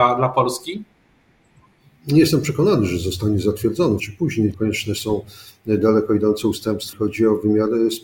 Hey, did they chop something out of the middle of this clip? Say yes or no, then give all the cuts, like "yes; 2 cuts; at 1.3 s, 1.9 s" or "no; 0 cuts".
yes; 3 cuts; at 4.0 s, 4.5 s, 6.9 s